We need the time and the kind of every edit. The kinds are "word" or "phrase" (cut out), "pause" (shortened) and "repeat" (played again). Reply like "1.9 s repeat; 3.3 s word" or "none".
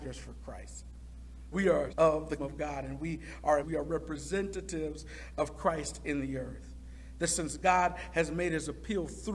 1.5 s word; 1.9 s word; 2.4 s word; 3.6 s word